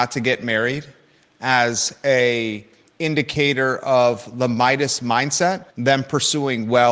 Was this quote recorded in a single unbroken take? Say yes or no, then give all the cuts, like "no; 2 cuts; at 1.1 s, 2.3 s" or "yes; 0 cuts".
no; 1 cut; at 5.7 s